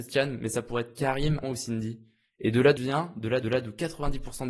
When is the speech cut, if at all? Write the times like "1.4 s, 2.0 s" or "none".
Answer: 1.4 s, 2.8 s, 3.4 s

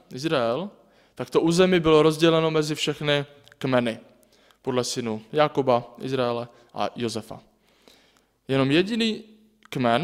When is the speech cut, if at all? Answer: none

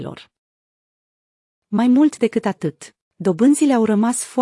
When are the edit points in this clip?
none

